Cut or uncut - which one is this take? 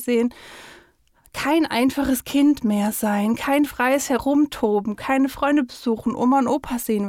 uncut